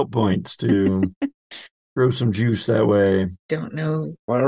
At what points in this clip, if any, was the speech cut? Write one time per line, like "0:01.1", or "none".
none